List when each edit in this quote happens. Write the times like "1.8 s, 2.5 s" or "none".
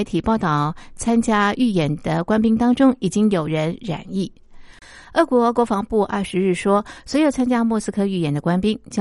none